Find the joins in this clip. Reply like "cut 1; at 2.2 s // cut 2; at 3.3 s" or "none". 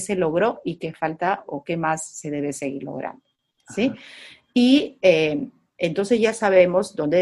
none